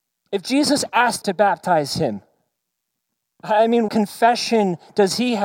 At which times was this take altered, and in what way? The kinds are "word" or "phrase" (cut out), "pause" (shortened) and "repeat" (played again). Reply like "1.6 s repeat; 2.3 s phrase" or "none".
1.2 s word; 3.9 s word